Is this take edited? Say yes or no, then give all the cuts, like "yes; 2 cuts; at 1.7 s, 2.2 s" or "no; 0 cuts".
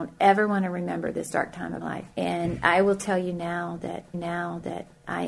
yes; 3 cuts; at 1.8 s, 2.1 s, 4.1 s